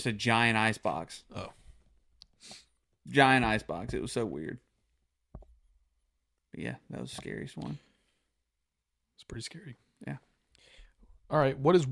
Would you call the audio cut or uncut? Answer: uncut